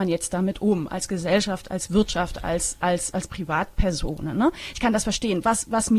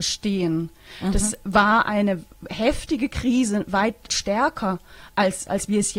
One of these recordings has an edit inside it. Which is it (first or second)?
second